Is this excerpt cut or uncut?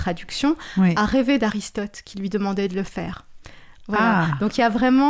uncut